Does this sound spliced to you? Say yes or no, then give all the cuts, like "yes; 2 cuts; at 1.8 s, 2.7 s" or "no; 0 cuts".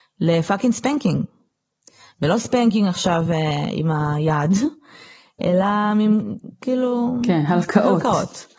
no; 0 cuts